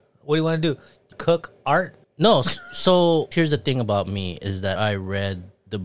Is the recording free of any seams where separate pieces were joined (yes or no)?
no